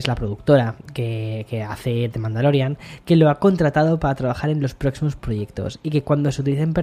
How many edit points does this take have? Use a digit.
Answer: 0